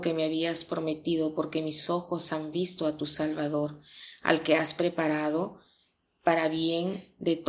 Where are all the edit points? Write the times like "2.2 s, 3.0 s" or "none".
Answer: none